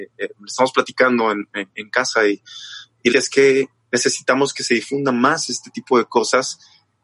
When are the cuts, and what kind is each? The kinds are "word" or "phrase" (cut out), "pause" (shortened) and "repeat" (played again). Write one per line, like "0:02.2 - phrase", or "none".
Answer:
0:03.1 - word